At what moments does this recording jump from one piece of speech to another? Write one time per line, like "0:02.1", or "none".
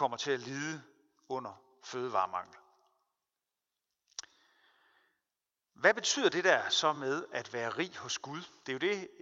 none